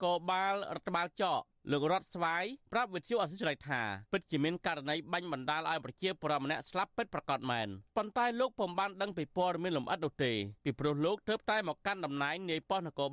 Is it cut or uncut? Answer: cut